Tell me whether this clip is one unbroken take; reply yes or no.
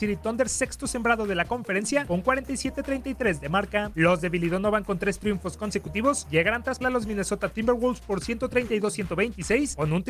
no